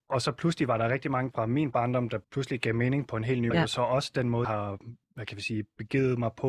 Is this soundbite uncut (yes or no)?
no